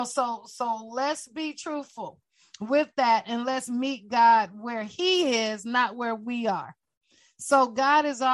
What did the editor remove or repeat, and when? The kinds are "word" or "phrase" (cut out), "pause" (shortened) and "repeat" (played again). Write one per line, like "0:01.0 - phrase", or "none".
none